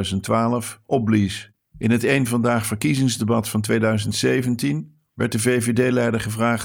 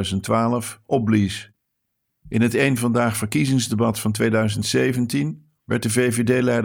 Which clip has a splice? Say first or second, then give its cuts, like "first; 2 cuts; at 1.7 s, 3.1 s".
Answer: first; 1 cut; at 1.6 s